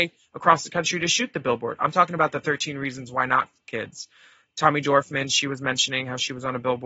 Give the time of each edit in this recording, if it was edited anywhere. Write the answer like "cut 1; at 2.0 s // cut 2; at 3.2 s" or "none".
none